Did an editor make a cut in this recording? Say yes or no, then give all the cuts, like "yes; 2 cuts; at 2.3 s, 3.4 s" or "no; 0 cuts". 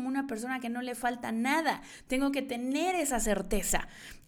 no; 0 cuts